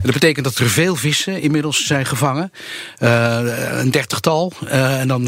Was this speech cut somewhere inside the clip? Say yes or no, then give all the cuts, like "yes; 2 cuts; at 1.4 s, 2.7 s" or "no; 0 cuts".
no; 0 cuts